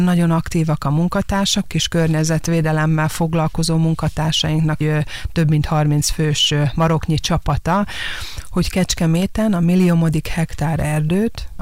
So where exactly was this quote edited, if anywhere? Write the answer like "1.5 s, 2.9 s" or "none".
1.7 s, 4.8 s